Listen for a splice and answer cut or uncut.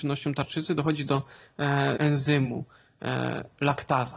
cut